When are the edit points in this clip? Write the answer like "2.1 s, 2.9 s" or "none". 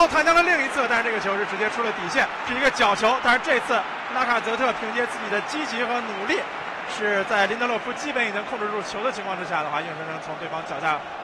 2.5 s